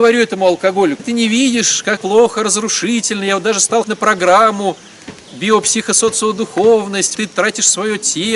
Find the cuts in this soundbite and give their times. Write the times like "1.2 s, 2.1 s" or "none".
1.0 s, 2.0 s, 3.8 s, 7.1 s